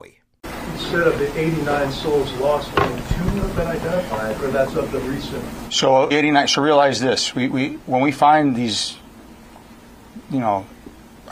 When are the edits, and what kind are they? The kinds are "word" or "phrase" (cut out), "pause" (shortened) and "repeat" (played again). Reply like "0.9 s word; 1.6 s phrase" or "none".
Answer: 6.1 s phrase